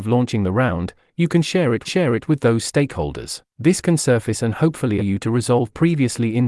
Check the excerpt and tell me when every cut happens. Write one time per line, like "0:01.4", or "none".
0:01.8
0:03.5
0:05.0